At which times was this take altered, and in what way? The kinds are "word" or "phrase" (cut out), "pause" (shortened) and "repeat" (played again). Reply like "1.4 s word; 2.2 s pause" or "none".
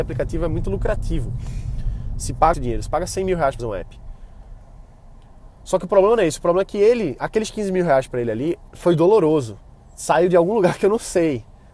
2.5 s word; 3.6 s word; 8.7 s pause; 9.8 s pause